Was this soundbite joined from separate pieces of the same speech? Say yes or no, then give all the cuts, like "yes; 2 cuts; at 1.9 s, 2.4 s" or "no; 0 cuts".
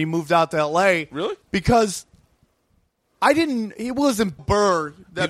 yes; 2 cuts; at 1.4 s, 4.4 s